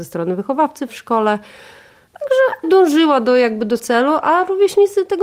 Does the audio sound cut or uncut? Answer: cut